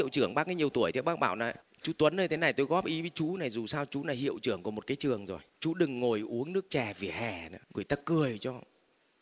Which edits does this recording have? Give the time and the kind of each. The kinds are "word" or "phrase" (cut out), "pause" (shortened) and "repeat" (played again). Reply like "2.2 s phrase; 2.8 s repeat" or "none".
1.6 s pause; 5.5 s pause; 7.6 s pause